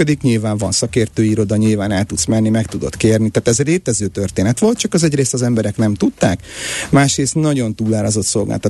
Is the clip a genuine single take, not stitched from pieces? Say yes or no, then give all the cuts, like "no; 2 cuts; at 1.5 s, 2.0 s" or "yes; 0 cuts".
yes; 0 cuts